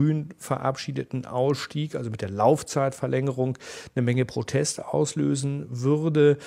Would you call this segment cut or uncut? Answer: uncut